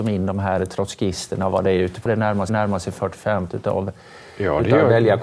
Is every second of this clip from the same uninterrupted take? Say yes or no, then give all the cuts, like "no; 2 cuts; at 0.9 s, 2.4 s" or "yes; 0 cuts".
no; 3 cuts; at 2.1 s, 2.5 s, 3.5 s